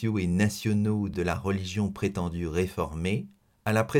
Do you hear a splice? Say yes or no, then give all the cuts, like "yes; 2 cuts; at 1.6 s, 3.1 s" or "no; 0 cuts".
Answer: yes; 1 cut; at 1.1 s